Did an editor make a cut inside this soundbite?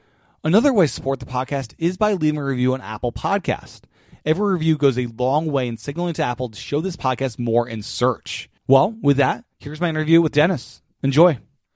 yes; 2 cuts; at 8.6 s, 9.5 s

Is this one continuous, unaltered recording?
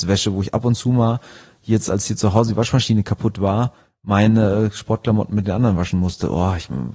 yes; 0 cuts

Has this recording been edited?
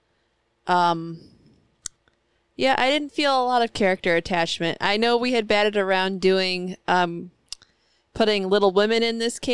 no; 0 cuts

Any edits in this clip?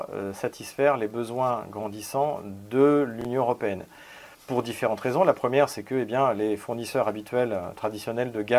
yes; 1 cut; at 4.3 s

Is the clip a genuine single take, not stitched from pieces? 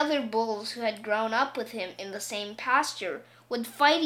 yes; 0 cuts

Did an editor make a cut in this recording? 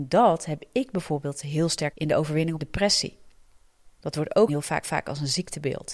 yes; 5 cuts; at 1.9 s, 2.6 s, 3.9 s, 4.5 s, 4.8 s

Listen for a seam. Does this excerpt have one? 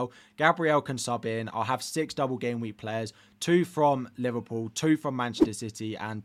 no; 0 cuts

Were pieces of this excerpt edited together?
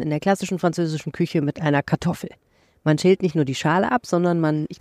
no; 0 cuts

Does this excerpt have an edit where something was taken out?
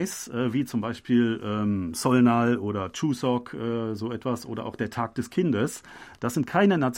no; 0 cuts

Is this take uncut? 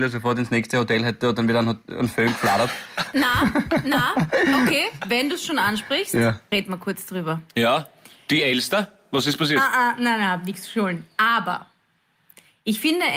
yes; 0 cuts

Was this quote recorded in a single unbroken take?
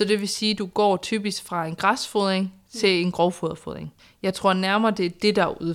no; 1 cut; at 4.0 s

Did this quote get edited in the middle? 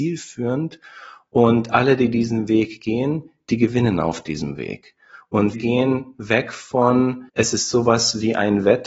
yes; 2 cuts; at 5.5 s, 7.3 s

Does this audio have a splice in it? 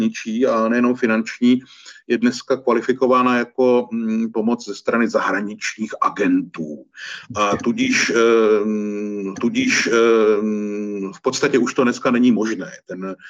yes; 1 cut; at 9.4 s

